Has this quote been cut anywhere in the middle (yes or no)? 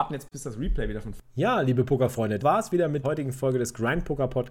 yes